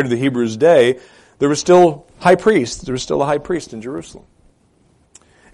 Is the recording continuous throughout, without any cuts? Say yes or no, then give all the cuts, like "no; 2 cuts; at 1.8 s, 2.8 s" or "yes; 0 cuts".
yes; 0 cuts